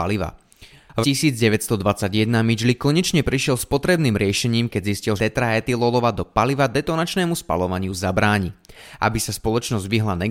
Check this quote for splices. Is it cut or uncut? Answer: cut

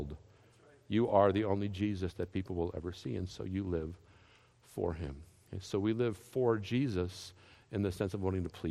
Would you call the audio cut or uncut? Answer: uncut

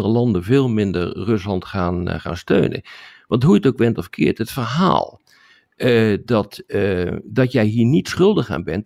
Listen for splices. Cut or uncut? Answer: uncut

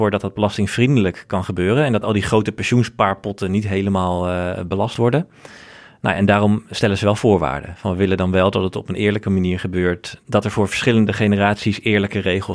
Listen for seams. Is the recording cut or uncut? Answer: uncut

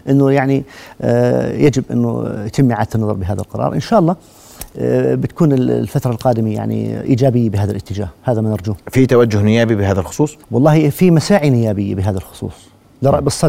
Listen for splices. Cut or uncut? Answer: cut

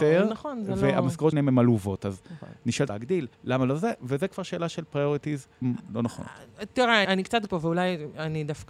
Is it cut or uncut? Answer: cut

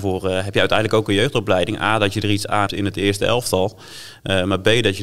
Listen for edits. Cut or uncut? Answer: cut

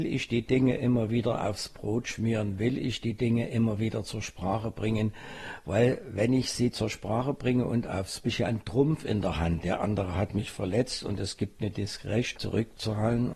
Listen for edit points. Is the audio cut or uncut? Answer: cut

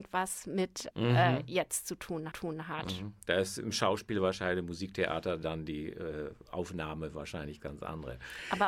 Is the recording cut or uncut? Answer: cut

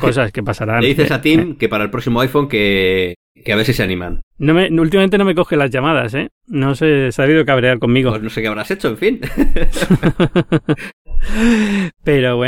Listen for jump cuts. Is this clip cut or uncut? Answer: uncut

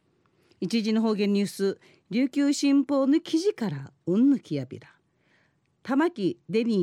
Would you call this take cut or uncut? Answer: uncut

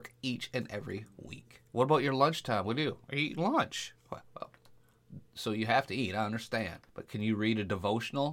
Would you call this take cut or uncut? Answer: cut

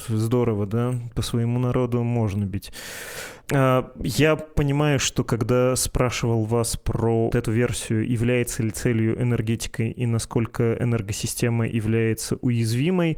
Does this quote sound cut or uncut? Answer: cut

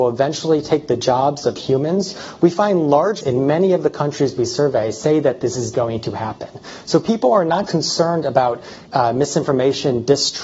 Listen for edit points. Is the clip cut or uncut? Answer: cut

